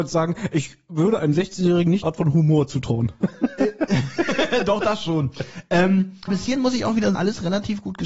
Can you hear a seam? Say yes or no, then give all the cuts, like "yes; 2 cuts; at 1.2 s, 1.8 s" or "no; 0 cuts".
yes; 3 cuts; at 2.0 s, 6.3 s, 7.1 s